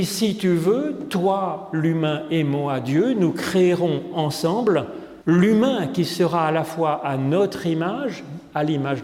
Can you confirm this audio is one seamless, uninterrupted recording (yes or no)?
no